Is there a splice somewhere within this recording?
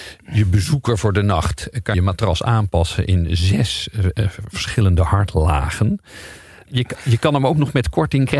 yes; 1 cut; at 1.9 s

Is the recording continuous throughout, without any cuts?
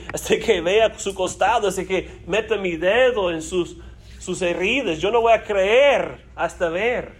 yes; 0 cuts

